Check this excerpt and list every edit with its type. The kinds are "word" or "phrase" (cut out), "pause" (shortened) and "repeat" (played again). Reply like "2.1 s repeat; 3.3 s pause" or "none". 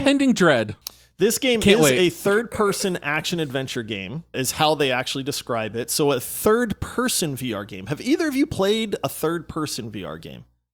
4.3 s word